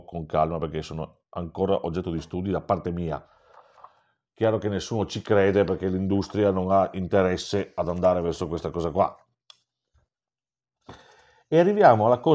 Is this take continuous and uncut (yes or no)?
yes